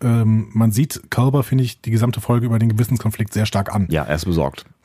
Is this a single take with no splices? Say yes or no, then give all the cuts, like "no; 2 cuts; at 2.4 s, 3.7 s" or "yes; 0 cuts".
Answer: yes; 0 cuts